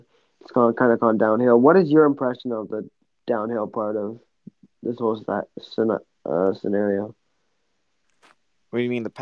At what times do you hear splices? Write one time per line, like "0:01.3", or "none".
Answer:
none